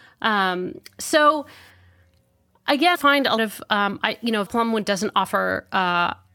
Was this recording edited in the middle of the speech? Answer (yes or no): yes